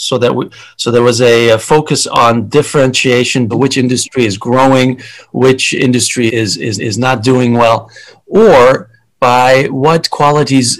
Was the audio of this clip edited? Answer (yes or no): yes